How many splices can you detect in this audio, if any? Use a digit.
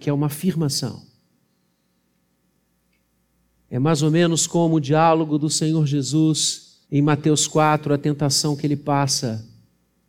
1